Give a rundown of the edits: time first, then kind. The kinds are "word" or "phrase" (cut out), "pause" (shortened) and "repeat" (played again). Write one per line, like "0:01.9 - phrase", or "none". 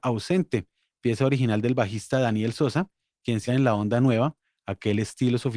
0:03.5 - word